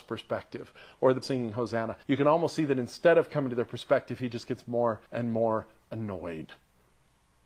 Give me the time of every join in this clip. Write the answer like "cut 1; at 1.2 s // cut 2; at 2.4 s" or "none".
cut 1; at 1.2 s // cut 2; at 2.0 s // cut 3; at 5.1 s